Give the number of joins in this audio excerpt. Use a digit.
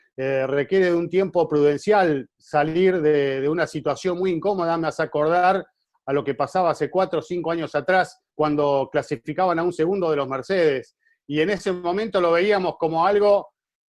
1